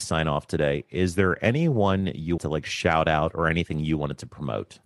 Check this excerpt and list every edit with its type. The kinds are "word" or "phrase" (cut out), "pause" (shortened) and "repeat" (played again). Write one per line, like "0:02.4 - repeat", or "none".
0:02.4 - word